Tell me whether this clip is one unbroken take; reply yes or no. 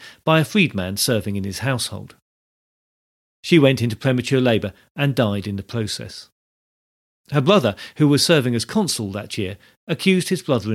yes